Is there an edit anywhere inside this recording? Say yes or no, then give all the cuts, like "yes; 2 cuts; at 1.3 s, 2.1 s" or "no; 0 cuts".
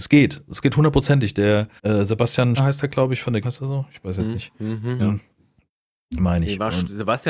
yes; 4 cuts; at 1.8 s, 2.6 s, 3.4 s, 5.0 s